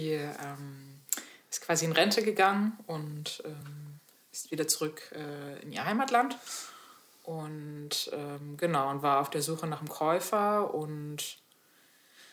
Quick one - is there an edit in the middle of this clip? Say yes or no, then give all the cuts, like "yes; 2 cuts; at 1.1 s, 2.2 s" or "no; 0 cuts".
no; 0 cuts